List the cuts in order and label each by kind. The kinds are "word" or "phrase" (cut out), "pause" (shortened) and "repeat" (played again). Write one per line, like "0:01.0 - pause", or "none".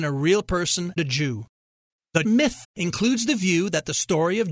0:01.0 - word
0:02.2 - word
0:02.6 - word